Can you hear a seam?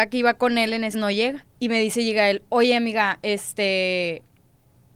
yes; 2 cuts; at 0.9 s, 1.5 s

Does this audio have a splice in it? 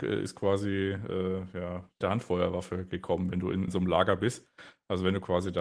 yes; 2 cuts; at 2.0 s, 3.7 s

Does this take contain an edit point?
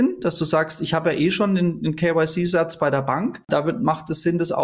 no; 0 cuts

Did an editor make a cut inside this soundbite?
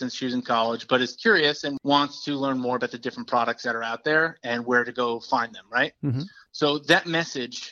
no; 0 cuts

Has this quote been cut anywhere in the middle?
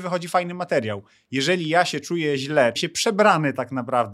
yes; 1 cut; at 2.8 s

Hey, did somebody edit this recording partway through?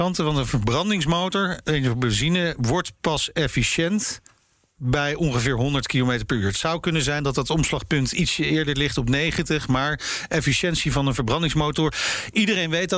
no; 0 cuts

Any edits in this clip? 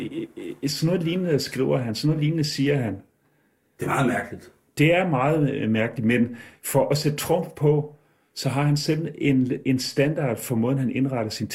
no; 0 cuts

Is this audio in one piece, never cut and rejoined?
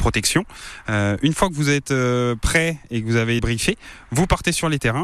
no; 1 cut; at 3.4 s

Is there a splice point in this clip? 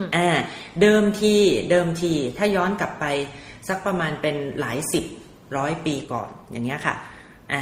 no; 0 cuts

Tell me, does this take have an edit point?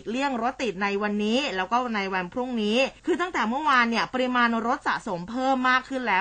yes; 1 cut; at 3.0 s

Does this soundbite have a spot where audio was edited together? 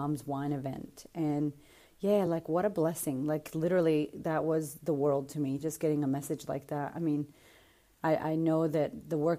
no; 0 cuts

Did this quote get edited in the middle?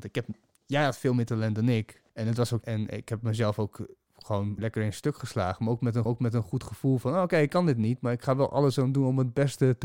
yes; 4 cuts; at 2.1 s, 2.6 s, 4.6 s, 6.1 s

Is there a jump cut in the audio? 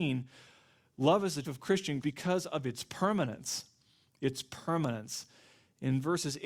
yes; 2 cuts; at 1.4 s, 2.0 s

